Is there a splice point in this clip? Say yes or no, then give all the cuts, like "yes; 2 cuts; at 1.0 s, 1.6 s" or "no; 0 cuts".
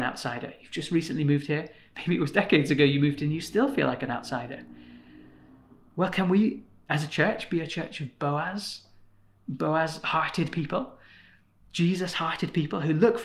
no; 0 cuts